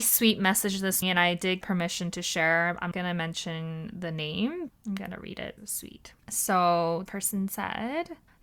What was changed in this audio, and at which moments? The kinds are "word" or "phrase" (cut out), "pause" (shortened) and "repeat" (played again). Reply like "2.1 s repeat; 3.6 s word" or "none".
1.0 s word; 1.6 s word; 2.9 s word; 4.7 s word; 5.6 s word; 7.1 s word